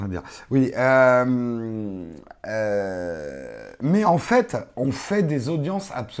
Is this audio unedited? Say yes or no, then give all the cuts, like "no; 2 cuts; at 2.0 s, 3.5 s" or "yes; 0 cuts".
yes; 0 cuts